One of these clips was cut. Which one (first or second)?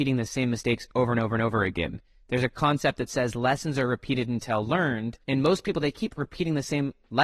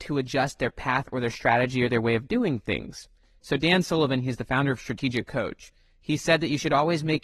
first